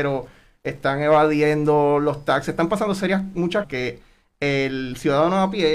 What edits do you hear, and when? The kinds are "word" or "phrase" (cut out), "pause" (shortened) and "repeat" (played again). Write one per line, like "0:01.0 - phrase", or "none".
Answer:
0:03.6 - word